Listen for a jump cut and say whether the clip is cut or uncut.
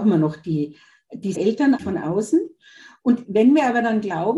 cut